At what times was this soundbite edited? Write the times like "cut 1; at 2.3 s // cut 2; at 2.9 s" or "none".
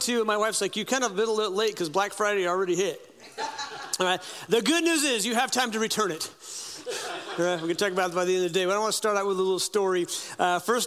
none